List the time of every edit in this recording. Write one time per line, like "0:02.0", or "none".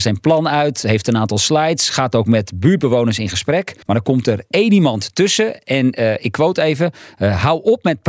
0:03.8